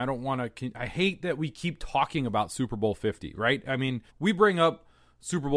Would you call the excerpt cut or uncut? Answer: cut